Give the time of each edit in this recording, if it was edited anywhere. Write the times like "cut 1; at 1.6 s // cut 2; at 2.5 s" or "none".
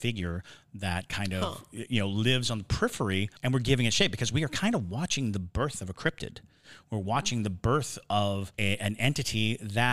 cut 1; at 3.4 s // cut 2; at 8.5 s